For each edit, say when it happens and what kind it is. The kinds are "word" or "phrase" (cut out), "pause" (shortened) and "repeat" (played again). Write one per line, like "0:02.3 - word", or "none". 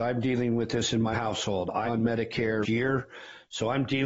0:01.1 - word
0:01.9 - word
0:02.6 - word